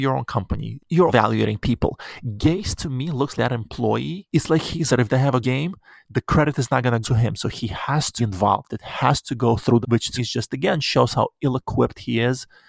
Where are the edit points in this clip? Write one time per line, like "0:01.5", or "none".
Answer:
0:01.1
0:03.4
0:04.9
0:05.4
0:07.0
0:08.2
0:09.8
0:10.2

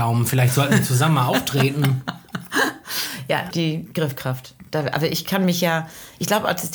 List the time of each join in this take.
0:03.5

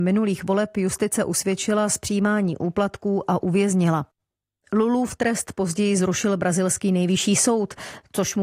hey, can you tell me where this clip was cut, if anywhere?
none

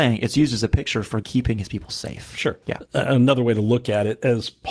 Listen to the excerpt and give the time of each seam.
0:01.2
0:02.6

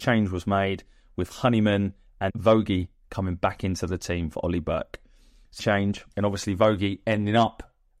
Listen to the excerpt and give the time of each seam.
0:02.3
0:05.6
0:06.1

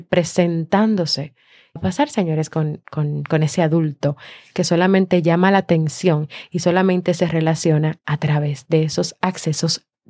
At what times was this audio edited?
0:01.8

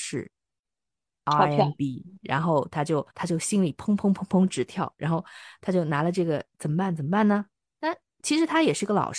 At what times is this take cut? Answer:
0:02.2
0:03.1

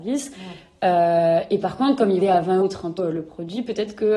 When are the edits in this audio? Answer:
0:02.2
0:02.6
0:03.0

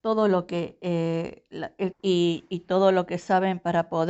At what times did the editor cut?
0:01.9

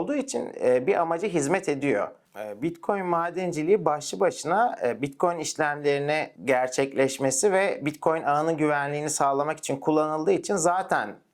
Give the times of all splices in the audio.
0:06.4

